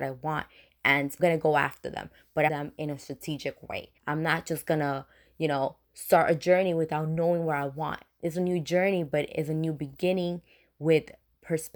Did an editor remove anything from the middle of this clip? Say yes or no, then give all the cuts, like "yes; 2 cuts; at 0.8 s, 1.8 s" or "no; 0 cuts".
yes; 4 cuts; at 1.2 s, 2.5 s, 4.0 s, 5.8 s